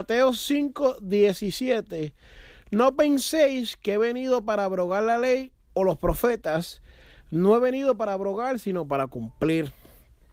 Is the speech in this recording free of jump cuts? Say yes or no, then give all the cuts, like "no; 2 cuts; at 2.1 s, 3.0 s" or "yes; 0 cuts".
yes; 0 cuts